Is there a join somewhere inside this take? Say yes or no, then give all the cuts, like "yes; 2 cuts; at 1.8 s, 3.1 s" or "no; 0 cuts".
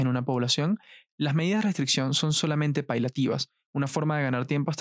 no; 0 cuts